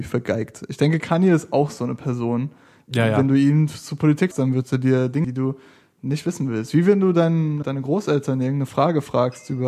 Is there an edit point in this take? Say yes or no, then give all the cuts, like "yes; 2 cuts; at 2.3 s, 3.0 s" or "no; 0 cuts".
yes; 3 cuts; at 4.3 s, 5.2 s, 7.6 s